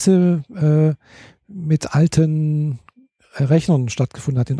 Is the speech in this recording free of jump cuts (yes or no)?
yes